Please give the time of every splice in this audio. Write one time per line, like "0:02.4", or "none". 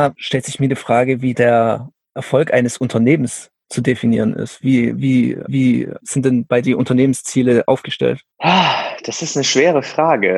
0:01.3
0:05.5
0:06.6
0:08.3

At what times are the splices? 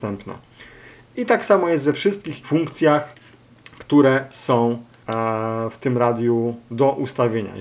0:02.4

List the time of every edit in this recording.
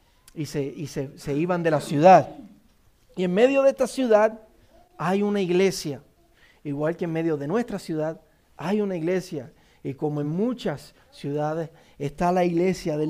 none

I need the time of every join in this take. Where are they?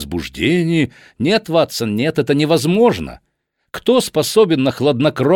none

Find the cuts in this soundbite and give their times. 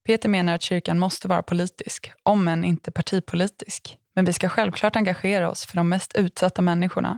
0:04.0

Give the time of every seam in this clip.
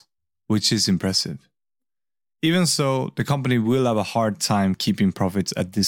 none

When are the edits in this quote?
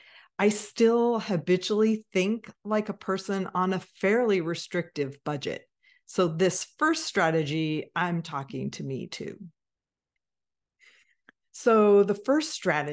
none

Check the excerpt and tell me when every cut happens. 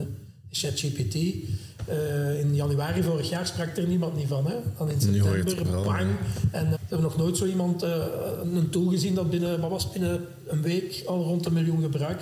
0:06.7

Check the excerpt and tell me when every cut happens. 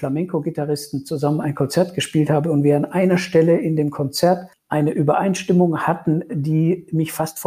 none

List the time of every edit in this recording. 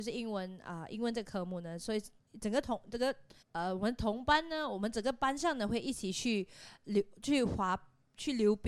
0:02.2
0:03.4

